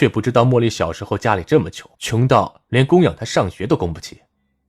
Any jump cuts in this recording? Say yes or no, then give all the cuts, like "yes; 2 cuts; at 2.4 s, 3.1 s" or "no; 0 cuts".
yes; 1 cut; at 1.9 s